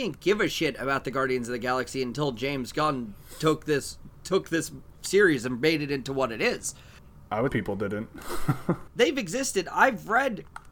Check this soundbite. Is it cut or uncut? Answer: cut